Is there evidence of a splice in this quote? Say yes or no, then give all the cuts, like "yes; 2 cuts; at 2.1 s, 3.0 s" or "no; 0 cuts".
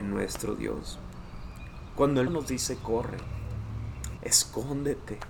yes; 2 cuts; at 2.3 s, 4.2 s